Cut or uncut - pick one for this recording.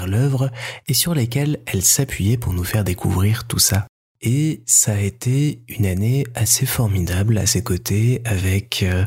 uncut